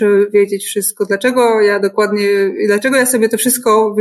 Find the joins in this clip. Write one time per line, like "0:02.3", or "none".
none